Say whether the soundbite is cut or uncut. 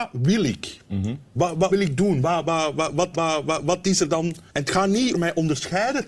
cut